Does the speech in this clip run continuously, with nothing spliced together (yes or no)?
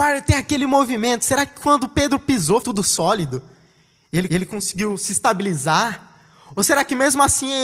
no